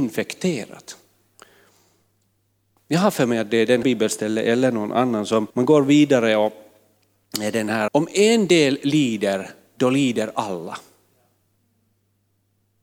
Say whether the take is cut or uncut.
cut